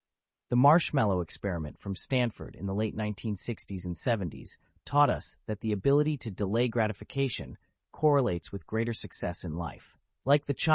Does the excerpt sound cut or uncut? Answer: uncut